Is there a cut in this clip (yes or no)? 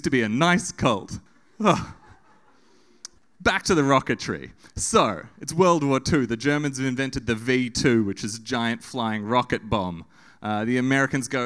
yes